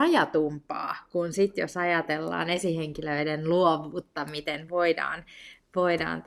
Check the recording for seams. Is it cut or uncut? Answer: uncut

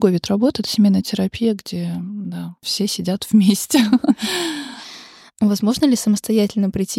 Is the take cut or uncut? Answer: uncut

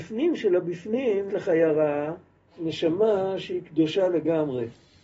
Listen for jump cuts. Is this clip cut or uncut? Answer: cut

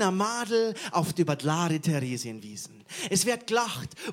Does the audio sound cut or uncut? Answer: cut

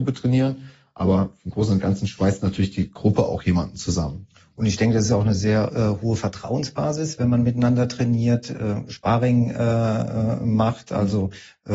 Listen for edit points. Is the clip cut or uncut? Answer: uncut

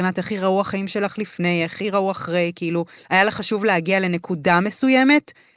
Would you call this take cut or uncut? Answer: uncut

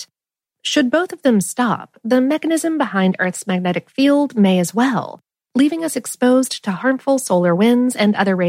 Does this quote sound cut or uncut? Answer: uncut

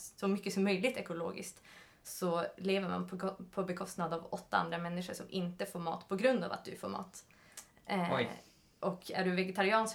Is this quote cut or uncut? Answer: uncut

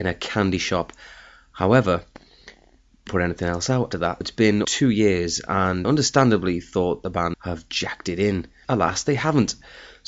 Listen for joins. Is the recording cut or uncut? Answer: cut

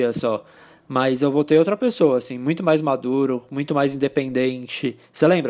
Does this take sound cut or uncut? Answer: uncut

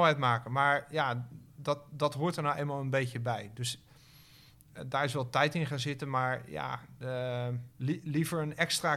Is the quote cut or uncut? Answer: cut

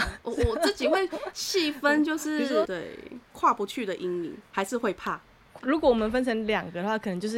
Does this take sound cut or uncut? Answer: cut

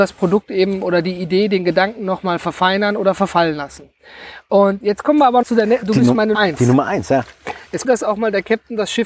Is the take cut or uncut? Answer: cut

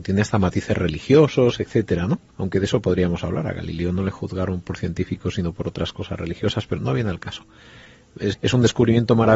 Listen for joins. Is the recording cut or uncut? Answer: cut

